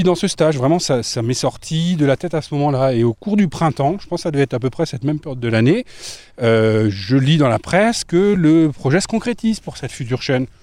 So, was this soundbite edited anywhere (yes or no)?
no